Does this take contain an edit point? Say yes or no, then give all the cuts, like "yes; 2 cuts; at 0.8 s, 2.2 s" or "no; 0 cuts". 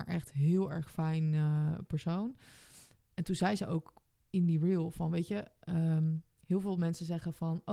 no; 0 cuts